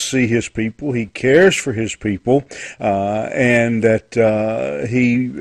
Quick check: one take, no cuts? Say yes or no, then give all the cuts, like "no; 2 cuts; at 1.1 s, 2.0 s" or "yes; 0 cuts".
yes; 0 cuts